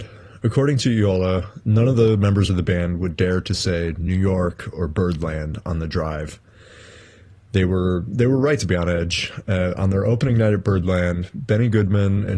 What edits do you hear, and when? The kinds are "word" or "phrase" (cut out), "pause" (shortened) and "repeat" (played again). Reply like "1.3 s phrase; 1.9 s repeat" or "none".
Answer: none